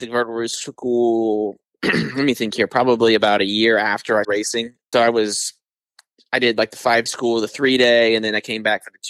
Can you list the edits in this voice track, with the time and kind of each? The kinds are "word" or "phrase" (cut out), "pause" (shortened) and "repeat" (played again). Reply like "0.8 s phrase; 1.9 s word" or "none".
4.2 s word; 4.9 s word; 7.1 s word